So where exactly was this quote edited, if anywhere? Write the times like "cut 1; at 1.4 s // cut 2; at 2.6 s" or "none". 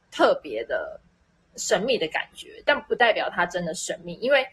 none